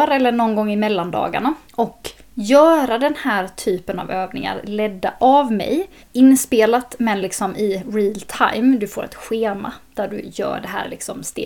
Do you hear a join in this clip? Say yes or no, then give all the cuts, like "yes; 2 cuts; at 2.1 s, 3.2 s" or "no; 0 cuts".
yes; 2 cuts; at 1.7 s, 6.0 s